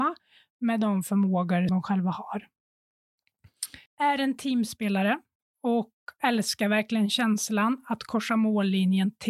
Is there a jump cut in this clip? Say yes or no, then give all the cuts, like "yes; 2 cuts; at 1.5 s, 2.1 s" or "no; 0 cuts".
yes; 3 cuts; at 1.7 s, 3.9 s, 5.4 s